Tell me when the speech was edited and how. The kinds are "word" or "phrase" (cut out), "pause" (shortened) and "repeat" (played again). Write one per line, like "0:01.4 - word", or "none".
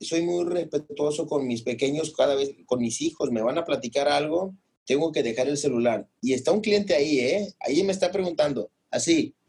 none